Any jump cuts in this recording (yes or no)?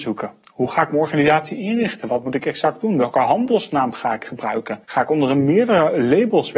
yes